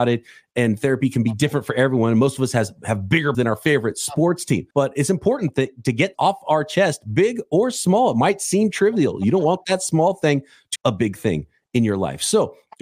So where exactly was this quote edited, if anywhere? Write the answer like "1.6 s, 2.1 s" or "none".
3.3 s, 4.7 s, 6.1 s, 10.8 s